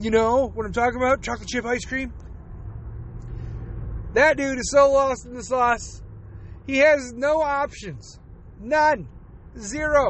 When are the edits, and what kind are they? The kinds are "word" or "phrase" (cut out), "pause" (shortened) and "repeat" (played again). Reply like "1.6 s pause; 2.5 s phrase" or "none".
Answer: none